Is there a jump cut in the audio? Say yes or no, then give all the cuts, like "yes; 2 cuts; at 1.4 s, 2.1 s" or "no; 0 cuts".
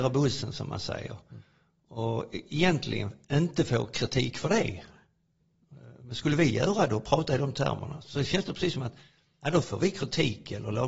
no; 0 cuts